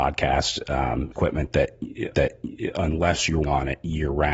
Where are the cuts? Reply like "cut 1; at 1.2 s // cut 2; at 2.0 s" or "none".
cut 1; at 1.1 s // cut 2; at 2.1 s // cut 3; at 3.4 s